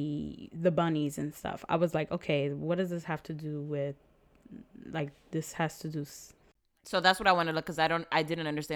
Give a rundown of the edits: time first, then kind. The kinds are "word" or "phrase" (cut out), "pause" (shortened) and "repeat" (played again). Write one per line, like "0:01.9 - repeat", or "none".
none